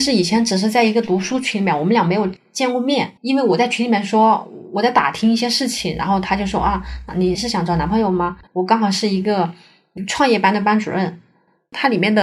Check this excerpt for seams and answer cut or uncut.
cut